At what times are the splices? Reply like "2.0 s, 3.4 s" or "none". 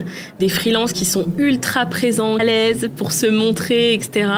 2.4 s